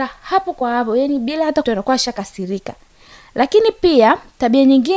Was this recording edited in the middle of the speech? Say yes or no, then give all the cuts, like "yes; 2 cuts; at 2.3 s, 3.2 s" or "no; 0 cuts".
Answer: yes; 1 cut; at 1.6 s